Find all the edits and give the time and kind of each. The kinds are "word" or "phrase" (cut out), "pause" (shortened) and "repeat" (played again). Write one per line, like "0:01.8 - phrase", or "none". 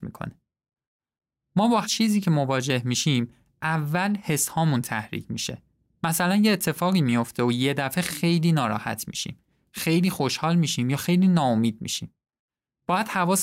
0:01.8 - word